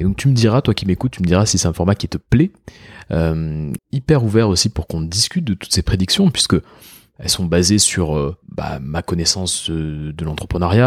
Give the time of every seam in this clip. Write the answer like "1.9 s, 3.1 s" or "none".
3.8 s, 8.4 s